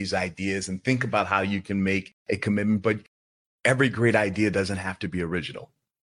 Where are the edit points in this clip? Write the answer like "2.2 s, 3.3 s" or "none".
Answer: none